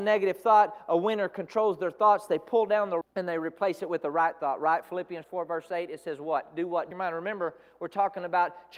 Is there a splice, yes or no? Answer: yes